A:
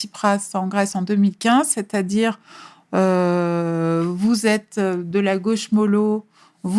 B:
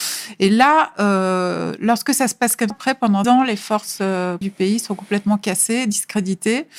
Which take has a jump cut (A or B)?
B